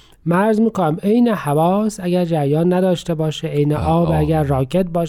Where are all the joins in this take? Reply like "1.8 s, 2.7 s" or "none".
none